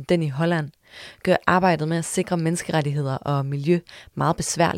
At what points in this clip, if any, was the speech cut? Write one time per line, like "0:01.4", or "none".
none